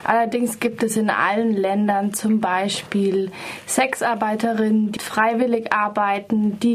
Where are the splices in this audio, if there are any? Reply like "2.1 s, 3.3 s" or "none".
5.0 s

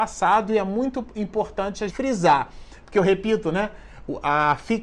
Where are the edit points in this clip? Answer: 1.9 s

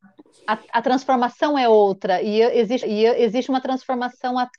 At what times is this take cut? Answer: 2.8 s

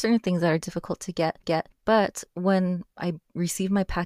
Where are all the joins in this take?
1.4 s

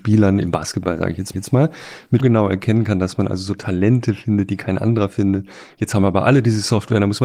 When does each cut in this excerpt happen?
1.3 s, 2.2 s

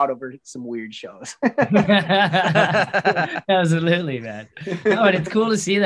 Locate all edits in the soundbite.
none

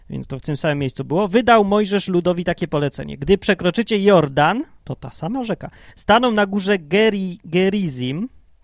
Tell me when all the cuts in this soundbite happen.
none

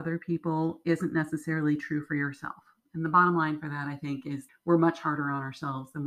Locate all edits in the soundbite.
4.5 s

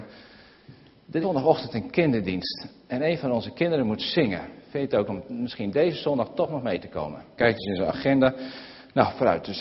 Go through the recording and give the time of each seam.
1.2 s, 5.1 s, 7.4 s

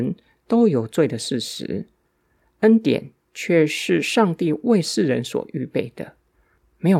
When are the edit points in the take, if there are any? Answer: none

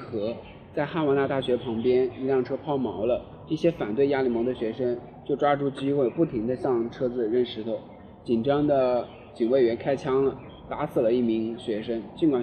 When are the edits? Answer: none

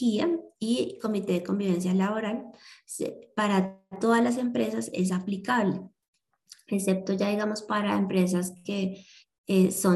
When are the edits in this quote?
none

